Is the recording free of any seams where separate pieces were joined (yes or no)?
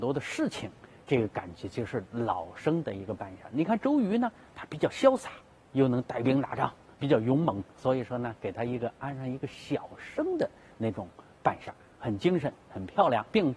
yes